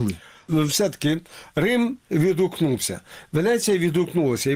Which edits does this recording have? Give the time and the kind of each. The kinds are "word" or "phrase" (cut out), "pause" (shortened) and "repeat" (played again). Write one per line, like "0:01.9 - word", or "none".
none